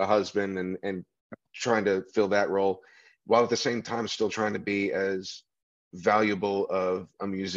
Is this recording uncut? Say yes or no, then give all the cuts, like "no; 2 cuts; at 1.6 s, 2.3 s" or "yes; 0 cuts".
yes; 0 cuts